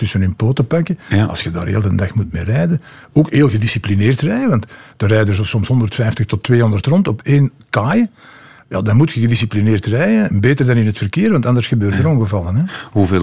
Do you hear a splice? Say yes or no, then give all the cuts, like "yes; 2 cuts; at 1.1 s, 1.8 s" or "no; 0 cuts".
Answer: no; 0 cuts